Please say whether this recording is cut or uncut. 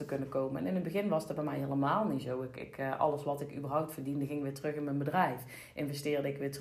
uncut